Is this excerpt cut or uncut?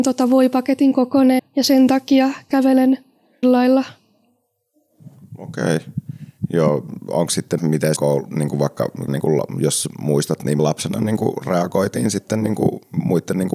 cut